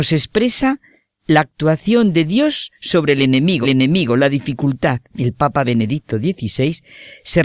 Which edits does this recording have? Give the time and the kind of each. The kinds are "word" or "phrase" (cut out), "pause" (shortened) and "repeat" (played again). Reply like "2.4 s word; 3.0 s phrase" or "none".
3.6 s repeat; 5.1 s pause